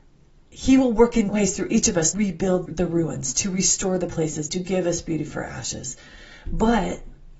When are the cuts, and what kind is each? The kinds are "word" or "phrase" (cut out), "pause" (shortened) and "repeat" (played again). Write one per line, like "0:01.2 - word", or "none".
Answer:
0:01.3 - word
0:02.1 - word
0:02.7 - word
0:04.5 - word